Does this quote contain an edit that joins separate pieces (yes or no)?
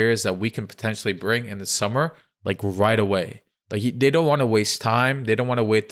no